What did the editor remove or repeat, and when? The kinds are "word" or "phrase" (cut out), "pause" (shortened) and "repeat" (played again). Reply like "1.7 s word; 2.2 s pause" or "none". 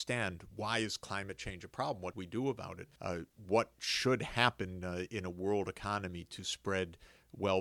2.1 s word; 3.0 s pause